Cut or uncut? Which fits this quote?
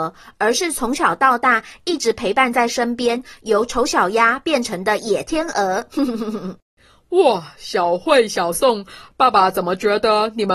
uncut